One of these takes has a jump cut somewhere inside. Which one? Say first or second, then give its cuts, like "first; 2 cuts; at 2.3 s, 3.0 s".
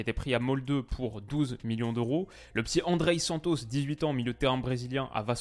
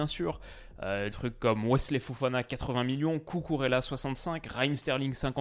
second; 1 cut; at 1.1 s